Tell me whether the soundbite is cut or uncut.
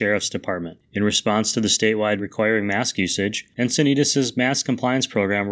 cut